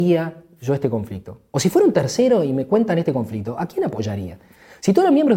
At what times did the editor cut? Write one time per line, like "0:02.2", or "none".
none